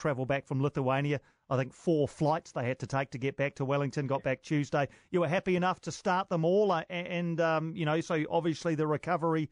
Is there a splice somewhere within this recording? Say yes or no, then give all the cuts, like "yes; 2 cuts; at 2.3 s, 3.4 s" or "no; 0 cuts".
no; 0 cuts